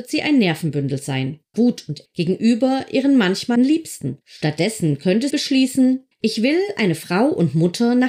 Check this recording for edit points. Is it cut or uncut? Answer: cut